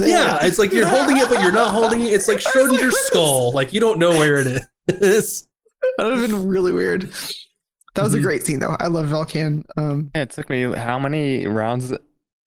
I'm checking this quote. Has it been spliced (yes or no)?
no